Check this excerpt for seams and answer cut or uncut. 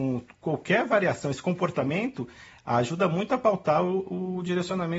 uncut